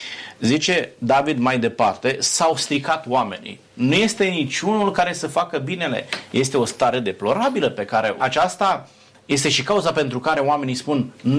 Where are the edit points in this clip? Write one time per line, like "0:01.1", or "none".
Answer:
0:08.2